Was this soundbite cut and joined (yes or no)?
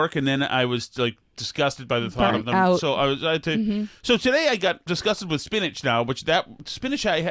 yes